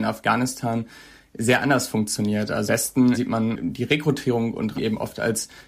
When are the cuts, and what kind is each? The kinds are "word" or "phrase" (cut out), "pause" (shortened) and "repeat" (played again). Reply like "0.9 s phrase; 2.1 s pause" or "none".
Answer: 2.7 s word; 3.1 s word; 4.7 s word